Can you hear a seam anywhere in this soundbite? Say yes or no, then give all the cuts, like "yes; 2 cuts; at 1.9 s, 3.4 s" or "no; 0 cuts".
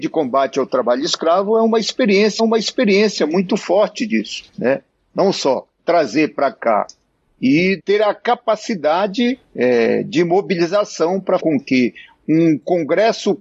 yes; 6 cuts; at 2.4 s, 4.5 s, 5.8 s, 7.8 s, 9.4 s, 11.4 s